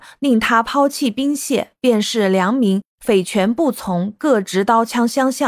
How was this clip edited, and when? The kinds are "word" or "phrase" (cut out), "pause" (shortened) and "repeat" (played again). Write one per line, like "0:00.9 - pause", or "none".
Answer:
0:02.9 - pause